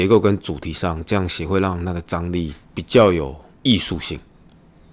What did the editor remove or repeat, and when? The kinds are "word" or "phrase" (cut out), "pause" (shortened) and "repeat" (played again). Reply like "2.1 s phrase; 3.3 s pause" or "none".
2.6 s pause; 3.5 s pause